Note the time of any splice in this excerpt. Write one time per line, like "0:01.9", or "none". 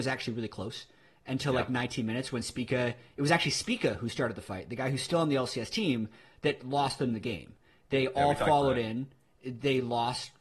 none